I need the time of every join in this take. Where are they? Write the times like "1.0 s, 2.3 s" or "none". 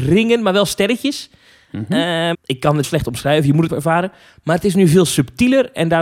2.3 s, 2.8 s, 3.7 s